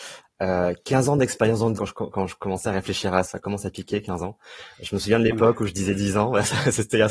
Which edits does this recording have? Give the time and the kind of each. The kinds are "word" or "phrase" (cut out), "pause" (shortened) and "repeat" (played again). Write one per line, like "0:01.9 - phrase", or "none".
0:01.8 - word
0:03.2 - word